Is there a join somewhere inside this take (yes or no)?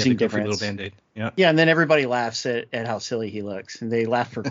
no